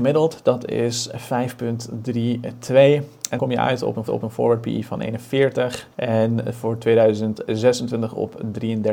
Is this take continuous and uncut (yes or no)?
no